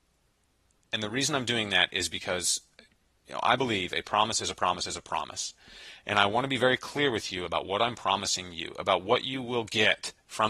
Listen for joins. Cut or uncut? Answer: uncut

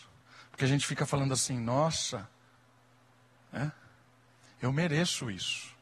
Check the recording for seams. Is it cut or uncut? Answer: uncut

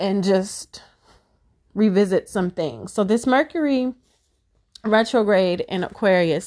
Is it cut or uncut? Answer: uncut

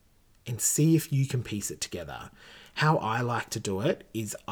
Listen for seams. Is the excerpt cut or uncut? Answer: uncut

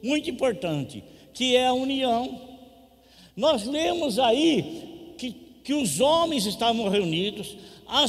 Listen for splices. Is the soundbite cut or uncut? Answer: uncut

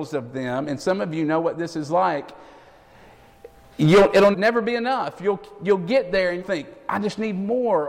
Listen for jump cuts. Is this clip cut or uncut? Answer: cut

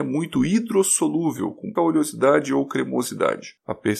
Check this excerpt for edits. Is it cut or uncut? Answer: cut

